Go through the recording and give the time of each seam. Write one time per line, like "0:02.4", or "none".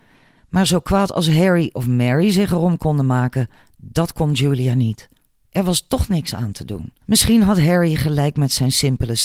0:07.0